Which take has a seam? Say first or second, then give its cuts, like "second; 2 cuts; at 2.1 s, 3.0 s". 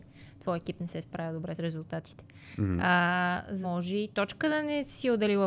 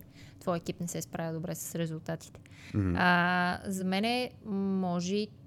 first; 3 cuts; at 1.6 s, 3.6 s, 4.1 s